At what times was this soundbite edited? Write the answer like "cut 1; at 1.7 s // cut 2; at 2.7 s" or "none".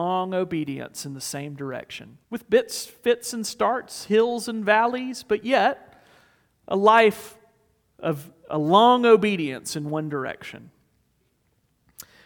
cut 1; at 2.2 s